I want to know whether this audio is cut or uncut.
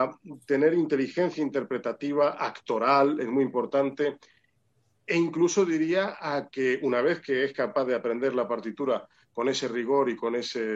uncut